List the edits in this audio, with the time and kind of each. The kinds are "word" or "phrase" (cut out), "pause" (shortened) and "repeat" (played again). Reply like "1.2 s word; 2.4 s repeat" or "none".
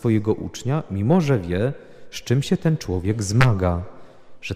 none

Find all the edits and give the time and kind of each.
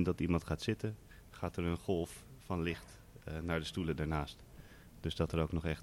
none

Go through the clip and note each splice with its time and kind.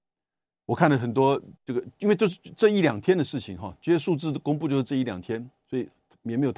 1.6 s pause

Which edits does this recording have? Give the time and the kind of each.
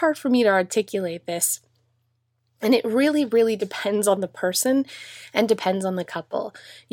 none

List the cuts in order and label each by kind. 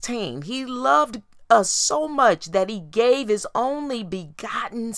none

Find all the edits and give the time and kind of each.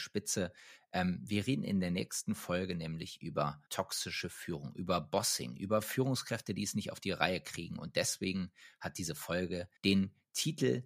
3.7 s pause; 9.8 s pause

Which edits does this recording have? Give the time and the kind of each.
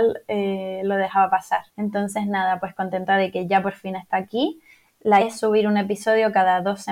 1.7 s pause; 5.2 s word

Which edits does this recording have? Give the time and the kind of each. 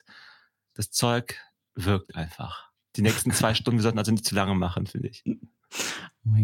none

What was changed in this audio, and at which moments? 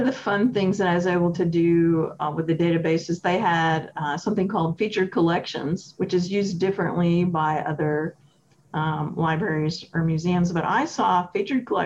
none

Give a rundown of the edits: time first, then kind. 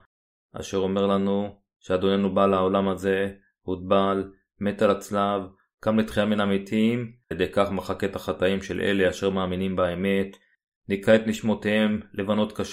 7.3 s word

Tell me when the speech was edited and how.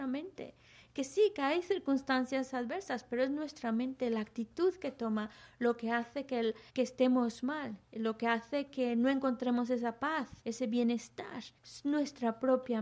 6.7 s pause; 7.8 s pause; 10.4 s pause; 11.6 s pause

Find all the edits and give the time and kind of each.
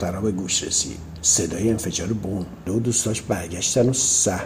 2.7 s word

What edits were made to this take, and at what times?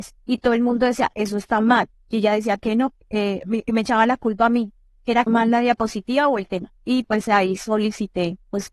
5.3 s phrase

